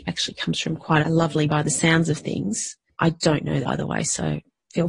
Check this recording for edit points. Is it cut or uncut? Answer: cut